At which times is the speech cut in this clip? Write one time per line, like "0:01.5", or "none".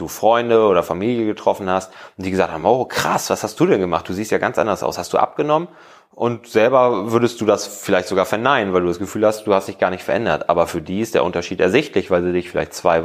none